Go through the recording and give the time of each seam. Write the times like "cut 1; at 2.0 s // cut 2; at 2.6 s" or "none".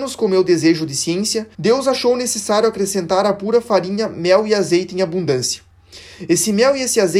cut 1; at 1.5 s